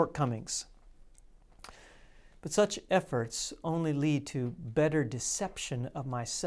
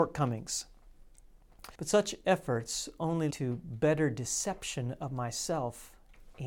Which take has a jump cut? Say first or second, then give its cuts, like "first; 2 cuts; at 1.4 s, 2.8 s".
second; 2 cuts; at 1.7 s, 3.3 s